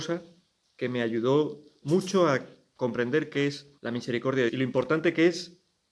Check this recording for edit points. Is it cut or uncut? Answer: cut